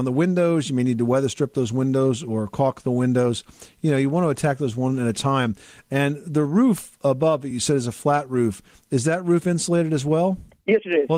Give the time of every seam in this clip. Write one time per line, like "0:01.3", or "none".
none